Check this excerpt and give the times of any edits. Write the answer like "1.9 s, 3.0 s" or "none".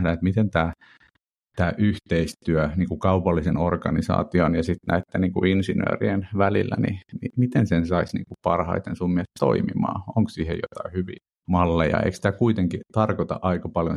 11.3 s